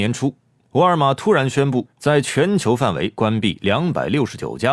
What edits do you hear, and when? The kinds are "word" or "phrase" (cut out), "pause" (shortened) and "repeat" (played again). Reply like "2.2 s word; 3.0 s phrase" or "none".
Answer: 1.9 s pause